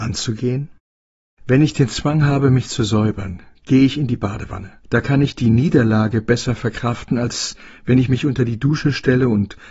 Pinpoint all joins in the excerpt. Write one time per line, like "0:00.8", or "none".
0:04.8